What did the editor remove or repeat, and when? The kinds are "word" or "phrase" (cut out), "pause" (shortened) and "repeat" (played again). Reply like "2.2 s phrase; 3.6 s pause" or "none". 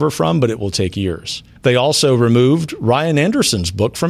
1.6 s pause